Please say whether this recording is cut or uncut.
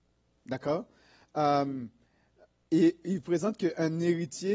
uncut